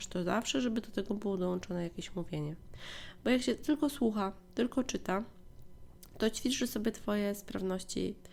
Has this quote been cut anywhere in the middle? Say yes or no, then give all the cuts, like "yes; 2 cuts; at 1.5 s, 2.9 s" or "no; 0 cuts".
no; 0 cuts